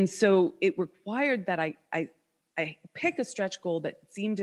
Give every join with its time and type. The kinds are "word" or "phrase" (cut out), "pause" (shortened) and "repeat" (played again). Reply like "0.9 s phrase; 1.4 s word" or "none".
none